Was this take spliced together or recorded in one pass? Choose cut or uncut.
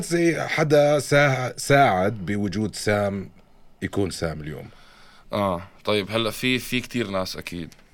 uncut